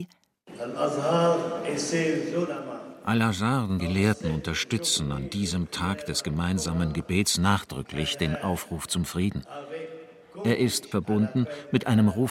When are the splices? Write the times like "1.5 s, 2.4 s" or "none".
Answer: 3.8 s, 10.9 s

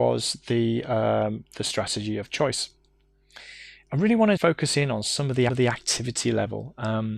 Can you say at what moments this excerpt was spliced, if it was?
4.4 s, 5.5 s

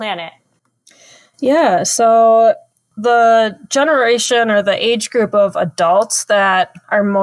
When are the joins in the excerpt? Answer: none

